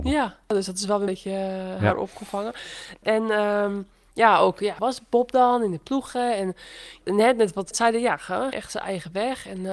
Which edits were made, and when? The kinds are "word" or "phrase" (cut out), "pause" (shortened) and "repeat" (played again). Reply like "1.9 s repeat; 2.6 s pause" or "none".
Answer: 1.1 s word; 4.8 s phrase; 7.7 s word; 8.5 s word